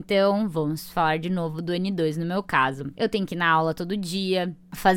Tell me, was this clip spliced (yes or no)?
no